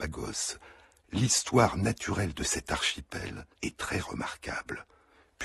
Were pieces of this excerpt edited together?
yes; 1 cut; at 3.5 s

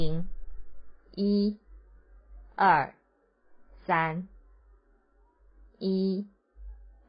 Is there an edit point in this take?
no; 0 cuts

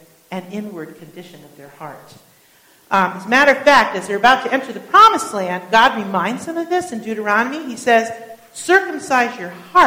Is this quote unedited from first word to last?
yes; 0 cuts

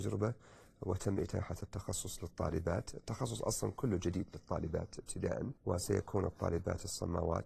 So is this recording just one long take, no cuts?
no; 1 cut; at 5.6 s

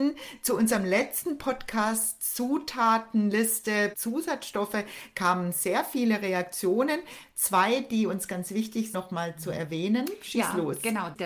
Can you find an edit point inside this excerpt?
yes; 2 cuts; at 3.9 s, 8.9 s

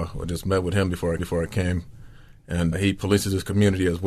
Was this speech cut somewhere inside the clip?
yes; 2 cuts; at 1.2 s, 2.7 s

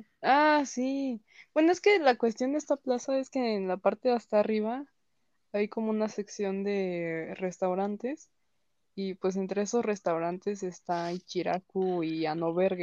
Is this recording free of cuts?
yes; 0 cuts

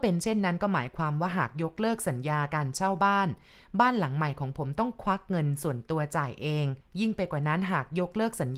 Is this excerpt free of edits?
no; 1 cut; at 6.8 s

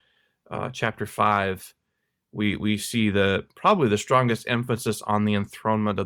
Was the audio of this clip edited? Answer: no; 0 cuts

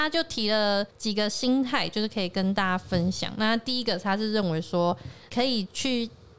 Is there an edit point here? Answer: yes; 1 cut; at 0.9 s

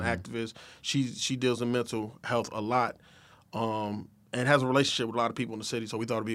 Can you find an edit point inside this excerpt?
no; 0 cuts

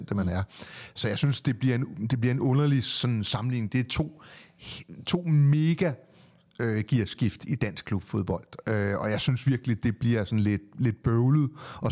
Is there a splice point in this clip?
no; 0 cuts

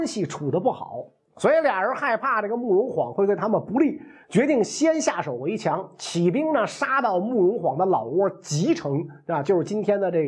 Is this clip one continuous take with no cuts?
yes; 0 cuts

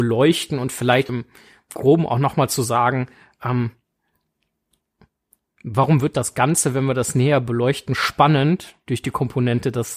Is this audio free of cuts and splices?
no; 1 cut; at 1.1 s

